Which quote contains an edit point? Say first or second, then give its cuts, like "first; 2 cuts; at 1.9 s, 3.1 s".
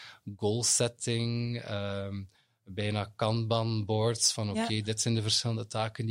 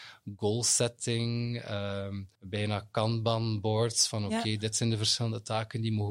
second; 1 cut; at 2.3 s